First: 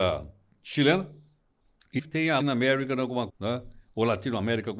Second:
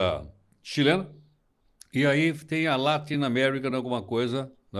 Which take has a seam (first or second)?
first